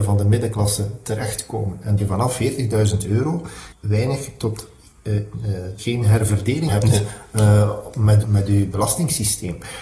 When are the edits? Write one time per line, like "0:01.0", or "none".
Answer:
0:02.0
0:03.7
0:05.8
0:06.7
0:08.2